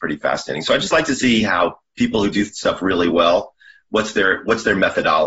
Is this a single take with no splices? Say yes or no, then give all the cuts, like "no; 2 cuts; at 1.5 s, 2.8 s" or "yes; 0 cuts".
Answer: yes; 0 cuts